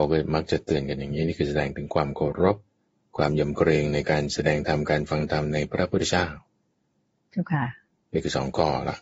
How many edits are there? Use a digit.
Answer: 0